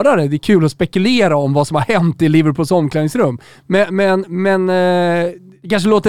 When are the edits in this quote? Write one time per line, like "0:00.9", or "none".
none